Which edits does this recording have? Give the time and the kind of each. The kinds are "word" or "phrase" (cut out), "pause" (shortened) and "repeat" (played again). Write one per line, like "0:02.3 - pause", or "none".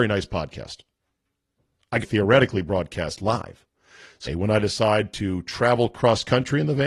0:02.0 - word
0:04.3 - word